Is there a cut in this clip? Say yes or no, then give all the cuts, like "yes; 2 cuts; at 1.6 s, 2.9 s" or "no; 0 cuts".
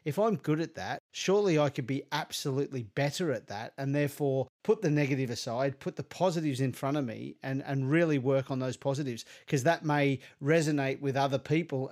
no; 0 cuts